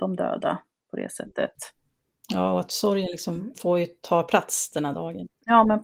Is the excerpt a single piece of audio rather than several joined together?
no; 1 cut; at 3.5 s

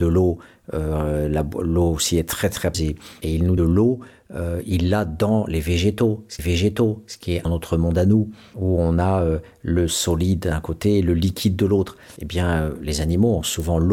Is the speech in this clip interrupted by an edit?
yes; 4 cuts; at 2.7 s, 3.6 s, 6.4 s, 7.4 s

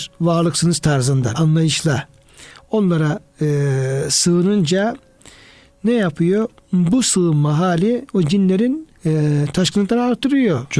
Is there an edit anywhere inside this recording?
yes; 2 cuts; at 1.3 s, 8.9 s

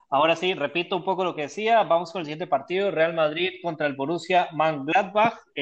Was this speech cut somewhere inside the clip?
no; 0 cuts

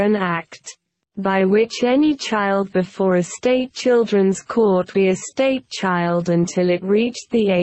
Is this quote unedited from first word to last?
no; 2 cuts; at 2.7 s, 4.9 s

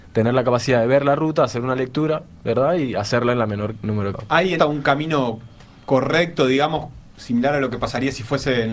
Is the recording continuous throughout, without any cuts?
no; 3 cuts; at 4.1 s, 4.6 s, 7.1 s

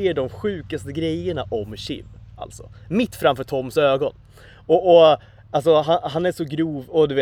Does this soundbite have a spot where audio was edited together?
no; 0 cuts

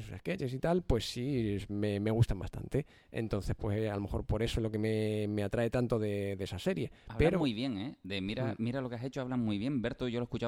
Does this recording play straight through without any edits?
no; 1 cut; at 7.0 s

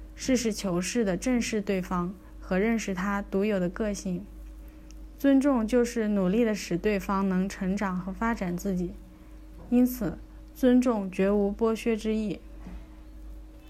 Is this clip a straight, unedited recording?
yes; 0 cuts

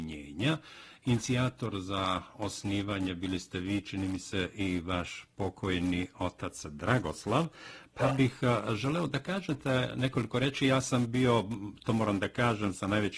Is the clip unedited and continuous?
yes; 0 cuts

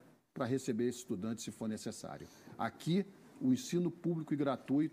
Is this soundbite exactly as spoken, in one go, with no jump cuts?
yes; 0 cuts

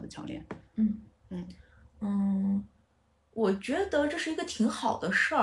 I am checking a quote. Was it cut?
no; 0 cuts

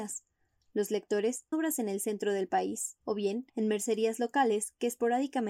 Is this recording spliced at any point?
yes; 3 cuts; at 1.5 s, 3.0 s, 3.5 s

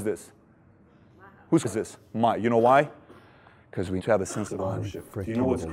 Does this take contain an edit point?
yes; 2 cuts; at 1.6 s, 4.0 s

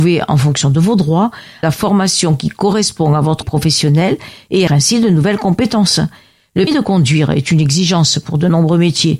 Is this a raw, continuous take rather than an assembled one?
no; 4 cuts; at 1.6 s, 3.4 s, 4.7 s, 6.7 s

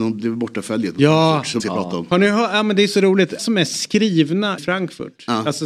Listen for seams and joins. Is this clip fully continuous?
no; 3 cuts; at 1.6 s, 3.4 s, 4.6 s

